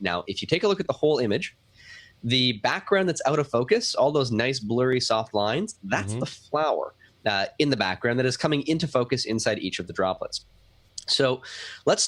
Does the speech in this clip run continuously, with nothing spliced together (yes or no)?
yes